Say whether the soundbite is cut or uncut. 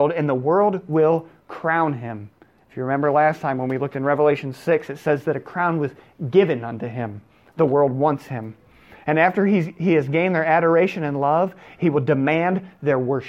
uncut